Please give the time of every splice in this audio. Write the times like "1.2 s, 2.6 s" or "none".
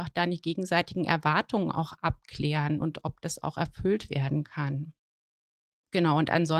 none

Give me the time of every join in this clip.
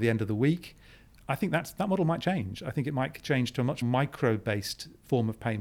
3.8 s

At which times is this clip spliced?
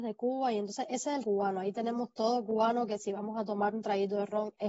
1.2 s

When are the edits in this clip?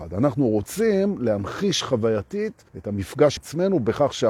2.7 s, 3.4 s

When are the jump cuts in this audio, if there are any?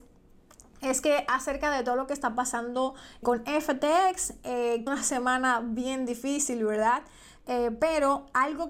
3.2 s, 4.9 s

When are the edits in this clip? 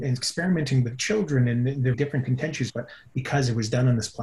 1.9 s, 2.7 s

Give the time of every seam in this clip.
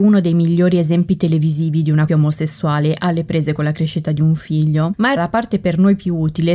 2.1 s, 5.2 s

